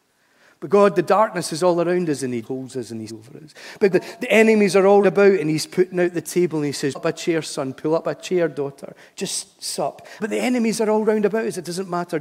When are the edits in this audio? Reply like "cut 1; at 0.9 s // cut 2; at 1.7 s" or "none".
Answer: cut 1; at 2.4 s // cut 2; at 3.1 s // cut 3; at 3.9 s // cut 4; at 5.0 s // cut 5; at 6.9 s // cut 6; at 10.2 s